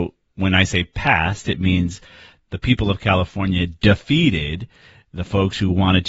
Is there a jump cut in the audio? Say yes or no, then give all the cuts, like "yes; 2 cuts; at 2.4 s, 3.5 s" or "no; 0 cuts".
no; 0 cuts